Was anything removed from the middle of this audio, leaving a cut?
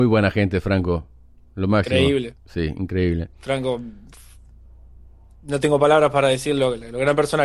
no; 0 cuts

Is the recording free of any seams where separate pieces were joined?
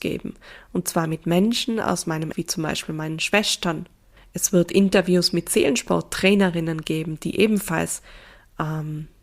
no; 2 cuts; at 2.3 s, 4.2 s

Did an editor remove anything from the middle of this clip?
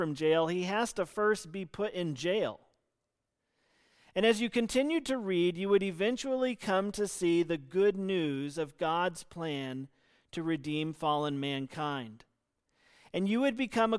no; 0 cuts

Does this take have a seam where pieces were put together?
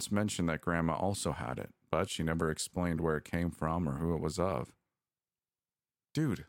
no; 0 cuts

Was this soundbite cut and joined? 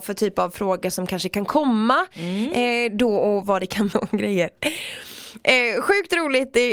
yes; 2 cuts; at 3.4 s, 3.9 s

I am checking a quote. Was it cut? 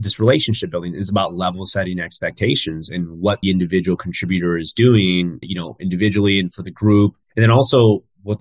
yes; 4 cuts; at 2.9 s, 3.4 s, 5.4 s, 7.2 s

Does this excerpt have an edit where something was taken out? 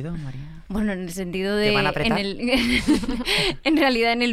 no; 0 cuts

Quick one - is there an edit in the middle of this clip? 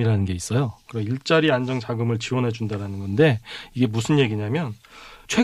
no; 0 cuts

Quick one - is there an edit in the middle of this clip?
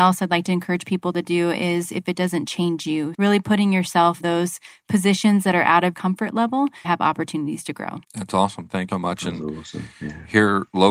yes; 7 cuts; at 2.5 s, 3.1 s, 4.2 s, 5.9 s, 6.8 s, 8.0 s, 8.9 s

